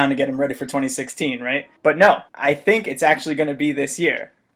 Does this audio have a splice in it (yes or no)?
yes